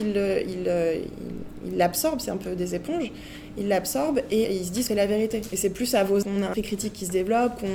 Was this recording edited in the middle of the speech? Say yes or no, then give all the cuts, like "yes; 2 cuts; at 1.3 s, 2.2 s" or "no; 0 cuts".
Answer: yes; 4 cuts; at 4.4 s, 4.9 s, 6.2 s, 6.5 s